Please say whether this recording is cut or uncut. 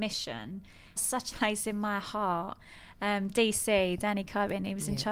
cut